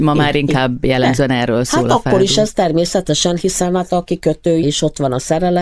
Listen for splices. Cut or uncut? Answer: cut